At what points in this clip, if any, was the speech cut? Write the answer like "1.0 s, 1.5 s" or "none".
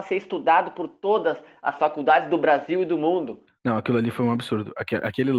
3.5 s